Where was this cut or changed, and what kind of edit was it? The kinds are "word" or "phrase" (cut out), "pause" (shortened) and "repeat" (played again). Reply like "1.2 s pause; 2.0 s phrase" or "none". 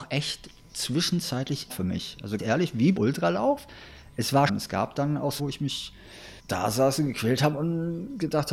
1.7 s word; 2.4 s word; 3.0 s word; 4.5 s word; 5.4 s word; 6.4 s pause